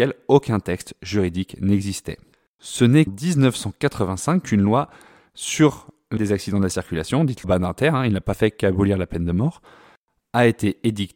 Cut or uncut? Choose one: cut